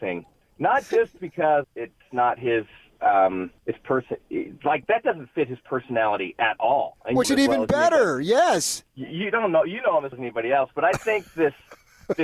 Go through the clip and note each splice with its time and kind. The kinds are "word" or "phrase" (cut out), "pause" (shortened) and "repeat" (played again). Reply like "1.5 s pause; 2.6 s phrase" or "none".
1.6 s phrase; 3.6 s pause; 7.2 s phrase; 8.9 s pause; 10.1 s word